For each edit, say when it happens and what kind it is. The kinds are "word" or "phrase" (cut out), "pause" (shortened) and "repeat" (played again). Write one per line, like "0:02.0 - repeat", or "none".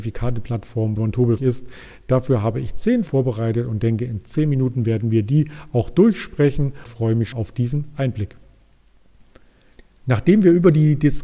0:01.0 - word
0:01.4 - word
0:03.1 - word
0:06.8 - word
0:07.3 - word